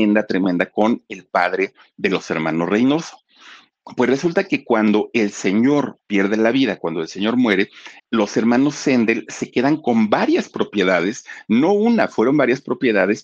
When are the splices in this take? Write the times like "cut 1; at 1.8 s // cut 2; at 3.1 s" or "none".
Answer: cut 1; at 8.0 s